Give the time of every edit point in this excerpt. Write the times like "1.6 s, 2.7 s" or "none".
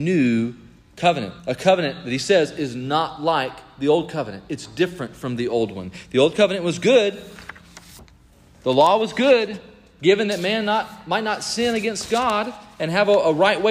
1.4 s